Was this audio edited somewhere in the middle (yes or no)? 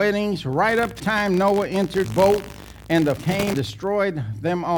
yes